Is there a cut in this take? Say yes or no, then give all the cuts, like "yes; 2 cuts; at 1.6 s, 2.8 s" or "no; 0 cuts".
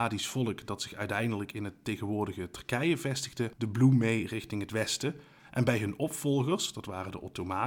no; 0 cuts